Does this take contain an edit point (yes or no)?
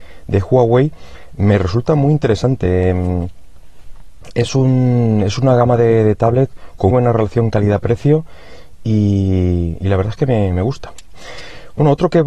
yes